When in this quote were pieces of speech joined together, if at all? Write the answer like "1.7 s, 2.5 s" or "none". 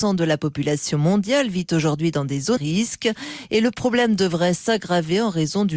2.6 s